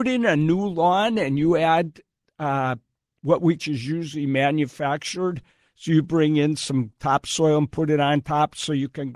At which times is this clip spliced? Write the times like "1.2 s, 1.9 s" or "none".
3.6 s